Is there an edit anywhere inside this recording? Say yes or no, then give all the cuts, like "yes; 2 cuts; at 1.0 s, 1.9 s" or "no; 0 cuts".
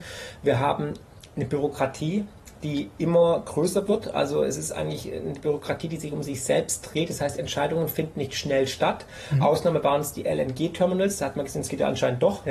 no; 0 cuts